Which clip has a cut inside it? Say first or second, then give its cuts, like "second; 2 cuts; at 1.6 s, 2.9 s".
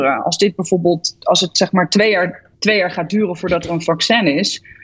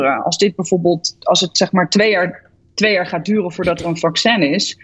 first; 1 cut; at 2.5 s